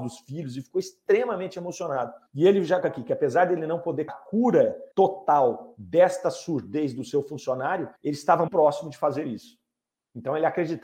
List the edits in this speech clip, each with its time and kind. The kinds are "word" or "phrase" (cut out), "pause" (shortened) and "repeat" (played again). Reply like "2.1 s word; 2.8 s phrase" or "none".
2.3 s pause; 2.8 s word; 4.1 s word; 4.9 s pause; 8.0 s pause; 8.5 s word